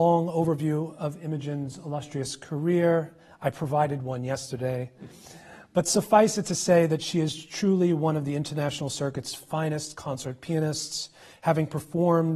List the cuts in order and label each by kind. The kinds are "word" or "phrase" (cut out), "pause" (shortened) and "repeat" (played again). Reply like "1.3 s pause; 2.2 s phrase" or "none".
none